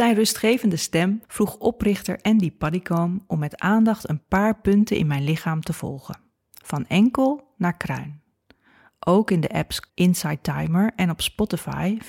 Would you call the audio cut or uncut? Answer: cut